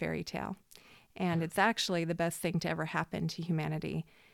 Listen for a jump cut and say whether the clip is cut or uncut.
uncut